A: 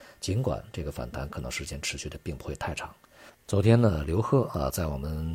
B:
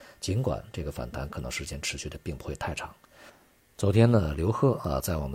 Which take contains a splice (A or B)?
A